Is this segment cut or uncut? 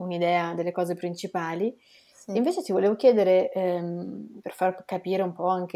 uncut